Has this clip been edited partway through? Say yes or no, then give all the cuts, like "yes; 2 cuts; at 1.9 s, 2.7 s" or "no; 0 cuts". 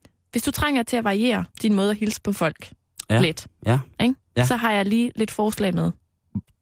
yes; 1 cut; at 1.5 s